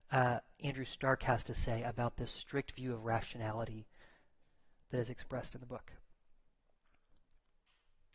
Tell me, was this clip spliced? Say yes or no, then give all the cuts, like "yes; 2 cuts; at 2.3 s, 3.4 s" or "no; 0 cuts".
no; 0 cuts